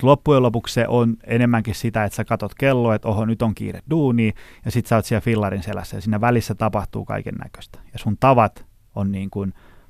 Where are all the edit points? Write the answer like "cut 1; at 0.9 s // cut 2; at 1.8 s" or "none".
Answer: none